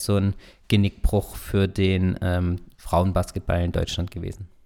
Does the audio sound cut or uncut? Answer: uncut